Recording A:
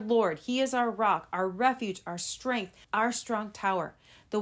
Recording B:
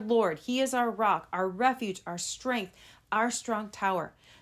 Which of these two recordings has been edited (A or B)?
A